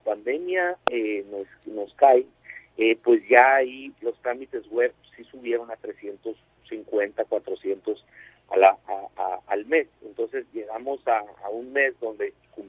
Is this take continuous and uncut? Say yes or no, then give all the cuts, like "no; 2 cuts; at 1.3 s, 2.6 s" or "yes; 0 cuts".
yes; 0 cuts